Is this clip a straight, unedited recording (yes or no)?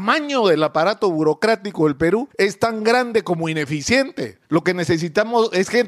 no